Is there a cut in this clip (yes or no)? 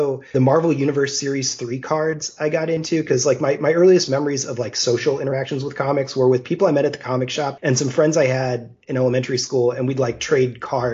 no